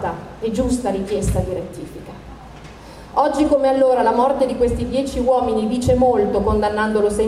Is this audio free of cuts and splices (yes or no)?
yes